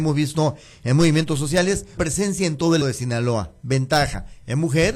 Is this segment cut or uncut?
cut